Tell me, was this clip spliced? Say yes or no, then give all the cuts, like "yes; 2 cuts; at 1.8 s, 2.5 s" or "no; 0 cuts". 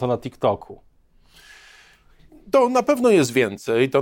no; 0 cuts